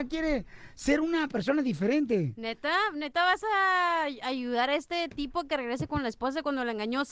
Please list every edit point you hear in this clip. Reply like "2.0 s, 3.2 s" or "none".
none